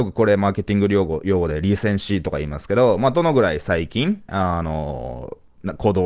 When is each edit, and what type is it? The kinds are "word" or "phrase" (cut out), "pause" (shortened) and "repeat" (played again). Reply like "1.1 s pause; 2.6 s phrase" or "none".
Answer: 4.3 s word